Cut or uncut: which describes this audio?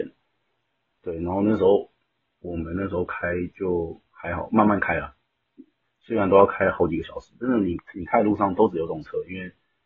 uncut